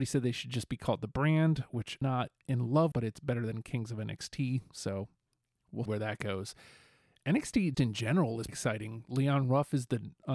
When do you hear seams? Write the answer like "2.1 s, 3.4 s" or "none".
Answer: 2.0 s, 2.9 s, 5.9 s, 7.7 s, 8.5 s